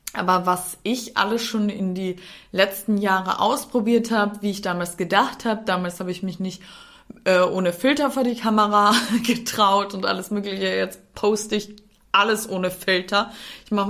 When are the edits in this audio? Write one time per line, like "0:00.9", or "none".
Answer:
none